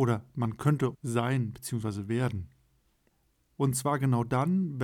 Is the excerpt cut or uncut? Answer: cut